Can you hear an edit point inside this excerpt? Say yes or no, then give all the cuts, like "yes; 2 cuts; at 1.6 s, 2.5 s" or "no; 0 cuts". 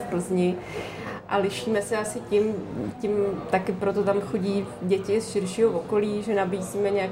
no; 0 cuts